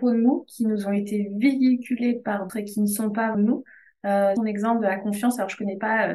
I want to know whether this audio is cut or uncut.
cut